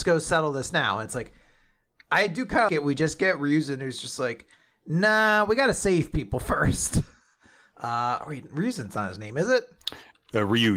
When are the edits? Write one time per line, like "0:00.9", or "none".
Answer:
0:02.7